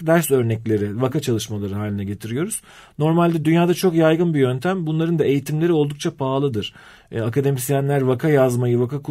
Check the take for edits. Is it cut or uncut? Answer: uncut